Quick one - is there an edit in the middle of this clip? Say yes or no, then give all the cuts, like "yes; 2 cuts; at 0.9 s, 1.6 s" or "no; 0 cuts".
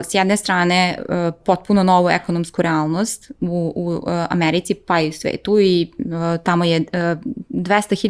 no; 0 cuts